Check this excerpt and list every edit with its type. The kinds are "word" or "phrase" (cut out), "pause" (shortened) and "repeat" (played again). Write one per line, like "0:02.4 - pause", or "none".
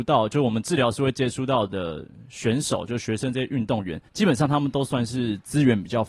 0:04.1 - pause